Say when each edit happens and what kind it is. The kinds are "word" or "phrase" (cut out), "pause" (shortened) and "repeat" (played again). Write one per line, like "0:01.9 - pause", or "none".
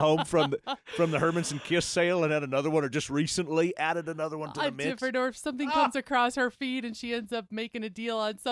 none